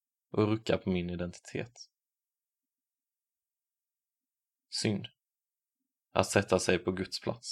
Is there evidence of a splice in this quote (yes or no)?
no